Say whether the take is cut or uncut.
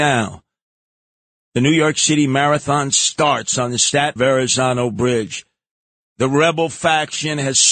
cut